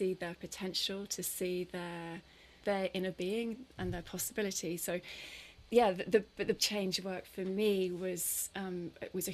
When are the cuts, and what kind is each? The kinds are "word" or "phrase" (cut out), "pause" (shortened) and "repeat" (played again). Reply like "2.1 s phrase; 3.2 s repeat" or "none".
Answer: 2.6 s word; 3.8 s word; 5.7 s word; 6.6 s word